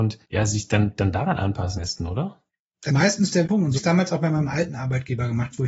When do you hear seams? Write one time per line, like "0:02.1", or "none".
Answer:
0:01.8
0:02.9
0:03.4
0:03.8

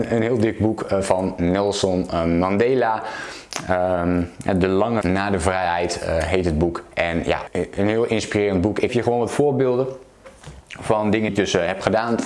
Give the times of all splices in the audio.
0:05.0
0:07.5
0:08.9
0:11.3

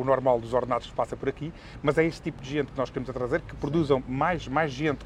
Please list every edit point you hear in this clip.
none

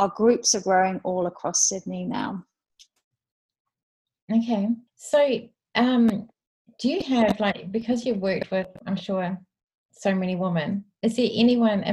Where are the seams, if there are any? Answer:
0:04.9

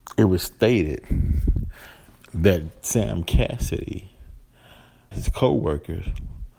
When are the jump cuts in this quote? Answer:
0:05.1

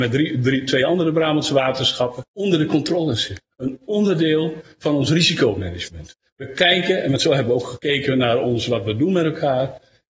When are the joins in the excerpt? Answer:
0:02.3
0:03.5

